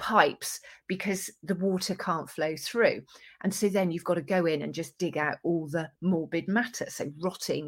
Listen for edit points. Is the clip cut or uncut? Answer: uncut